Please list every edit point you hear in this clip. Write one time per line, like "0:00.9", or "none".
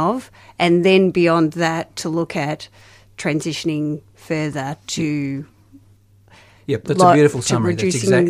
none